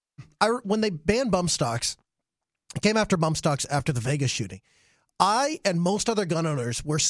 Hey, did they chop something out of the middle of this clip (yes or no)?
no